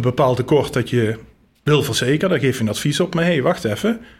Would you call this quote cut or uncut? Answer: uncut